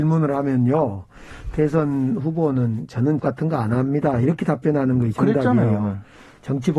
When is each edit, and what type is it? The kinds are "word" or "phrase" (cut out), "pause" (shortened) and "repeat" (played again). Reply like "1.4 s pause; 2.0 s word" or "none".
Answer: 3.2 s word